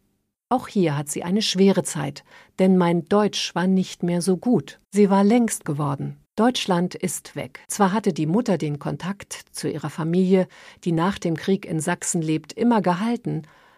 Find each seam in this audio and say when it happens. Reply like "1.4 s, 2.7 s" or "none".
2.3 s, 4.8 s, 5.6 s, 6.3 s, 7.3 s, 7.6 s